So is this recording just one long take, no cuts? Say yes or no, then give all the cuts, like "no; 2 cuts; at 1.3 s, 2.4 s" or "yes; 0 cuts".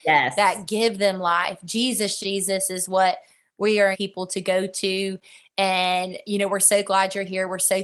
no; 2 cuts; at 2.2 s, 3.9 s